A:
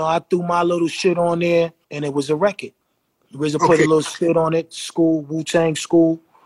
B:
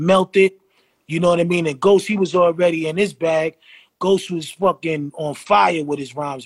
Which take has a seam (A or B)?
A